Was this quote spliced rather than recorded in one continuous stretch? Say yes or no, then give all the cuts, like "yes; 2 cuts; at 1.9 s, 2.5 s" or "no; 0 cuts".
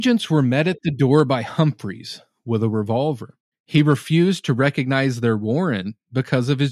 yes; 1 cut; at 3.5 s